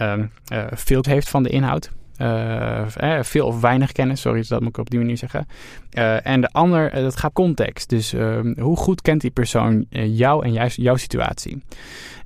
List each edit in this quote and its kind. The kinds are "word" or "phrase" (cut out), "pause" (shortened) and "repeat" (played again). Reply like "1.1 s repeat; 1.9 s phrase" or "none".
1.0 s word; 7.3 s word